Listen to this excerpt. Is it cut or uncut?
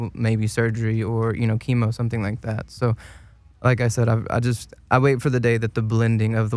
uncut